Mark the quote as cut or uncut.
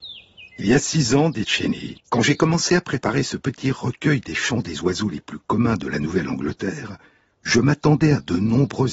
cut